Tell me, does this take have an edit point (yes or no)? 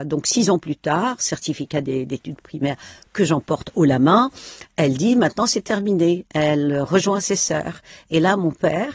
no